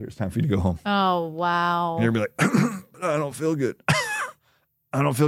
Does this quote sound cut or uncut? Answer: uncut